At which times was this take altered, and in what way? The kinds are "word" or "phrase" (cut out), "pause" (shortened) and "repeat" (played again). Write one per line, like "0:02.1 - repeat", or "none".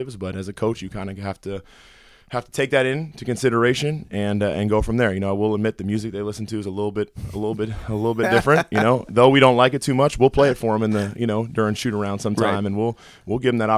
none